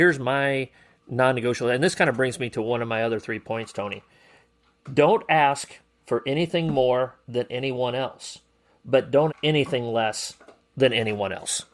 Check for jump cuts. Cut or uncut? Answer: cut